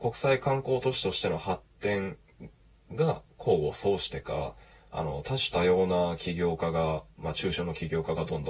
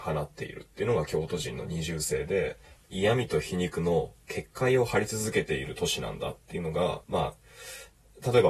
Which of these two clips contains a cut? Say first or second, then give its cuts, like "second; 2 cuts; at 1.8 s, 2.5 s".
second; 2 cuts; at 2.6 s, 7.0 s